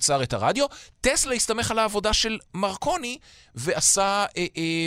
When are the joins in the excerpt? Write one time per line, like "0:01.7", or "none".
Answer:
none

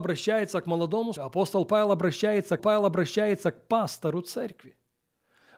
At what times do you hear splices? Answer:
0:01.2
0:02.6

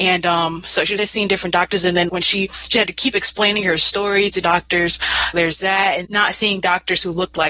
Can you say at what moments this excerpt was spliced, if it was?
0:01.0
0:02.1
0:04.4
0:05.3
0:06.0

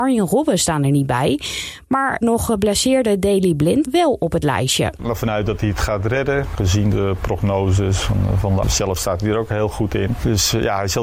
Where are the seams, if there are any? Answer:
0:02.2
0:03.8
0:05.0
0:08.6

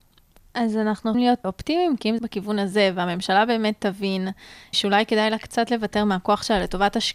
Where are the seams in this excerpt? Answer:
0:01.1
0:01.4
0:02.2
0:04.7

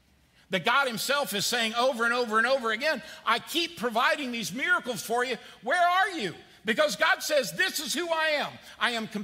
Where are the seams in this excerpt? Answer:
none

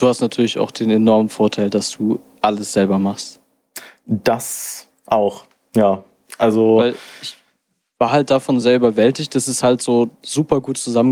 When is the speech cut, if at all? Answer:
none

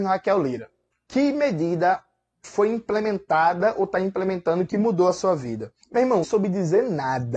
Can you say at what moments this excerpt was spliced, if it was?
0:05.8
0:06.2

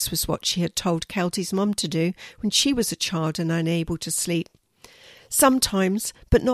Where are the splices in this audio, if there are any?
none

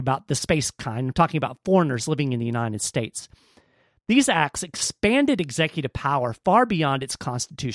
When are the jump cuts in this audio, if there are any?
none

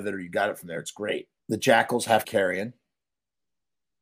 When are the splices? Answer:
0:01.4
0:02.2

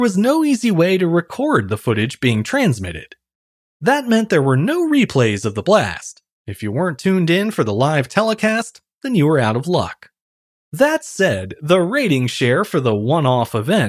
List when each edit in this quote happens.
none

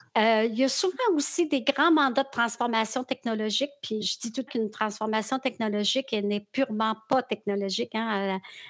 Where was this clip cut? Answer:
0:04.0
0:04.5

